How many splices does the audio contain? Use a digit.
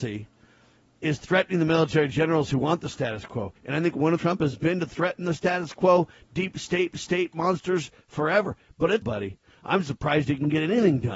4